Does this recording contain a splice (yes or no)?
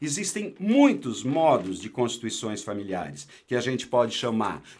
no